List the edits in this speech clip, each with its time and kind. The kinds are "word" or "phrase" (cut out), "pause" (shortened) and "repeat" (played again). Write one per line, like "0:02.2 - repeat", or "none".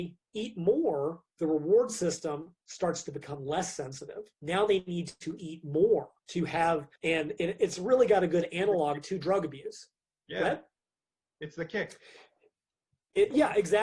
0:02.6 - pause
0:04.3 - pause
0:06.2 - pause
0:07.0 - pause